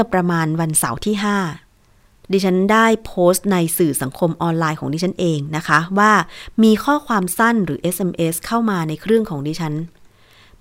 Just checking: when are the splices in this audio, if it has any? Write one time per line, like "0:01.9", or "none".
none